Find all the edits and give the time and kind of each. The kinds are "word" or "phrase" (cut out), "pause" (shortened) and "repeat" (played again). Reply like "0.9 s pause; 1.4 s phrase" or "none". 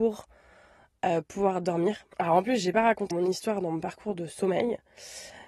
2.1 s pause; 3.1 s word